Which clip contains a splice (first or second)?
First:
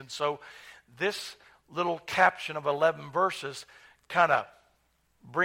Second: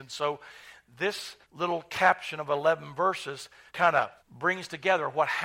second